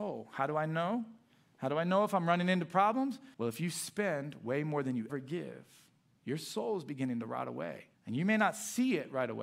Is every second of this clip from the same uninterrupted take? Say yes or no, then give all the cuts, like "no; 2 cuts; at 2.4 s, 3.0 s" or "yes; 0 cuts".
no; 3 cuts; at 3.3 s, 5.1 s, 7.9 s